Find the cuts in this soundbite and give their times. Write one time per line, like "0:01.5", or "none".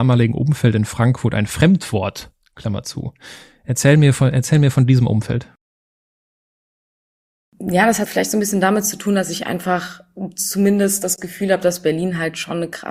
0:08.0